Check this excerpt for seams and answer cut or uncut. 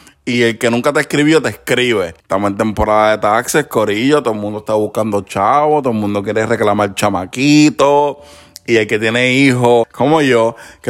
uncut